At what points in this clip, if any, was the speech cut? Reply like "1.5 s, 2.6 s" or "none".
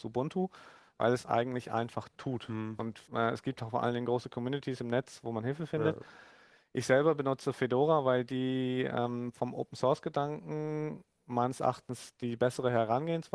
3.0 s